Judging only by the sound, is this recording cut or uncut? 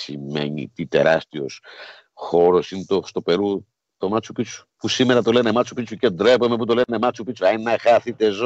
cut